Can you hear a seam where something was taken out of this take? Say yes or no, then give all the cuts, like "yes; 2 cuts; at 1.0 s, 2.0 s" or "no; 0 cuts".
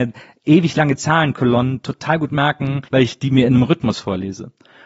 yes; 1 cut; at 2.9 s